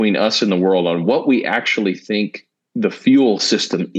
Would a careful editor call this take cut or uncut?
uncut